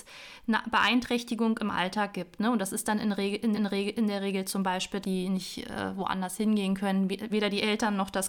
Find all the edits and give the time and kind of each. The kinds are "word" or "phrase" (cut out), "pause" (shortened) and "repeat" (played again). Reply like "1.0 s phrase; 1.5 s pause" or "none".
3.5 s repeat; 5.0 s word; 7.3 s word